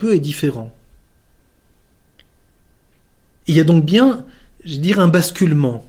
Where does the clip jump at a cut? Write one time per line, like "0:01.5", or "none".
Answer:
none

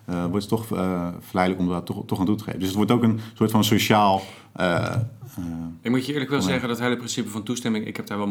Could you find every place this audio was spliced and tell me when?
none

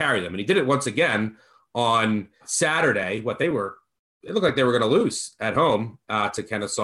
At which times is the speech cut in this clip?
none

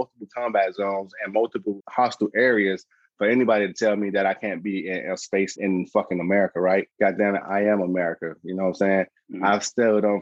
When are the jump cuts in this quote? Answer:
0:01.8
0:05.6
0:06.9

